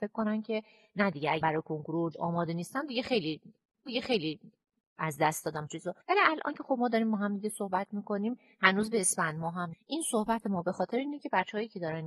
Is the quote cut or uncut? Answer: cut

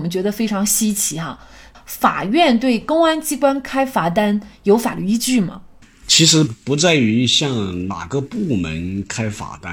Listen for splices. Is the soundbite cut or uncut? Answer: uncut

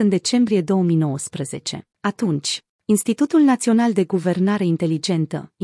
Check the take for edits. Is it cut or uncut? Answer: cut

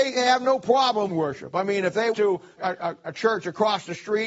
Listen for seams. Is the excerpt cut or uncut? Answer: cut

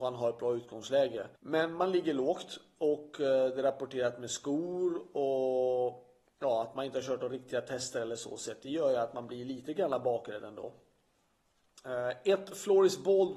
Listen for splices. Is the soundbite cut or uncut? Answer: cut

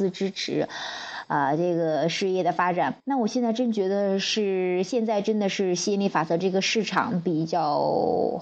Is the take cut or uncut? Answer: cut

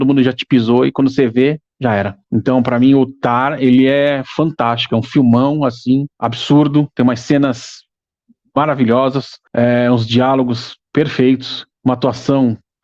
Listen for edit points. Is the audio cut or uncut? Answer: cut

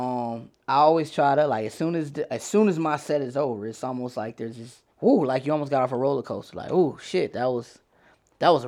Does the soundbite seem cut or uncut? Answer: cut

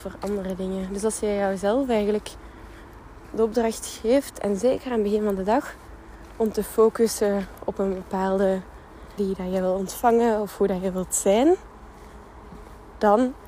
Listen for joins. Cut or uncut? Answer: cut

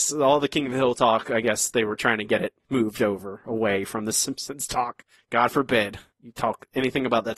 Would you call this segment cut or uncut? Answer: uncut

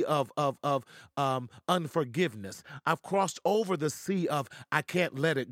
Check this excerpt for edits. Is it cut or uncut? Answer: uncut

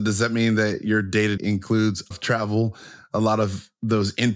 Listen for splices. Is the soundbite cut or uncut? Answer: cut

